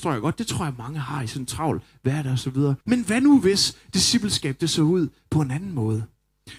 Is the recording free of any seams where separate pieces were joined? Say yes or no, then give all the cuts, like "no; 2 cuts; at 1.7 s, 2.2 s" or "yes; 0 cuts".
no; 1 cut; at 2.8 s